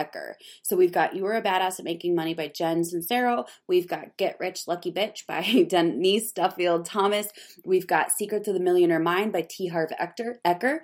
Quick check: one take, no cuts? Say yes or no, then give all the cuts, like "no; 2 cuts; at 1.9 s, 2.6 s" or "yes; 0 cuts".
yes; 0 cuts